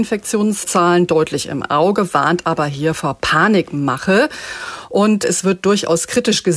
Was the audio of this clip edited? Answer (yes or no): no